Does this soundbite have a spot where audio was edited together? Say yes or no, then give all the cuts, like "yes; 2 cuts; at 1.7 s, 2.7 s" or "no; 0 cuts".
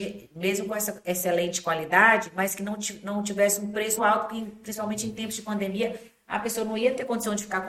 yes; 1 cut; at 4.0 s